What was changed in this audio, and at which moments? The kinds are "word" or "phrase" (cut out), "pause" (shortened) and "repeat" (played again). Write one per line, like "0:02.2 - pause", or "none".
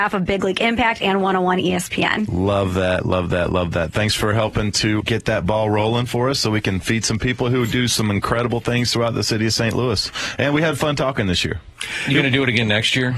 0:05.0 - word